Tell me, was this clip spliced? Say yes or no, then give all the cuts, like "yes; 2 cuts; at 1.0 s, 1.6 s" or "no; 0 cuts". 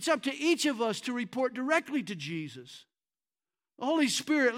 no; 0 cuts